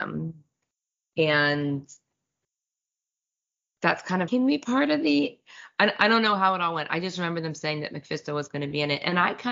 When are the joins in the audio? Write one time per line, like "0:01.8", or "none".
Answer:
0:04.3